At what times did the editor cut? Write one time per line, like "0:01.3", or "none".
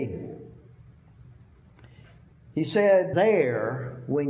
0:03.1